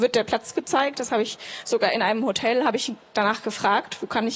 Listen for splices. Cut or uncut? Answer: uncut